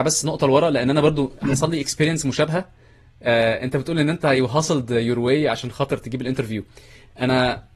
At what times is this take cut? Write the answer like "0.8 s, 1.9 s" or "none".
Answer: none